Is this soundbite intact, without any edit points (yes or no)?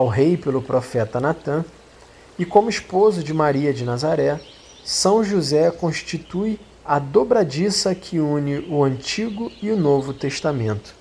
no